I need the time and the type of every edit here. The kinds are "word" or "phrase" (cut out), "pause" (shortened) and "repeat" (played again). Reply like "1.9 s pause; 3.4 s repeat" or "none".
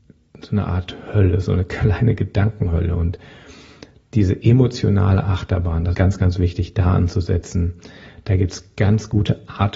5.9 s word